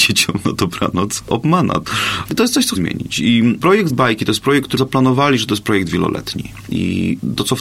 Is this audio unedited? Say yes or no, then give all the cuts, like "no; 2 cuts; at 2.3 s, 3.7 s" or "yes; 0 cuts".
no; 4 cuts; at 2.7 s, 3.6 s, 3.9 s, 4.8 s